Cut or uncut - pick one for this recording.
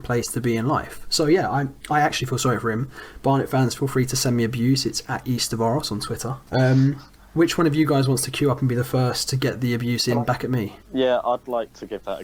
cut